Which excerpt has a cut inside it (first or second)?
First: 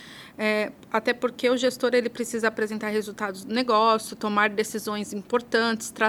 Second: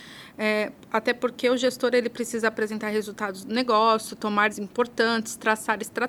second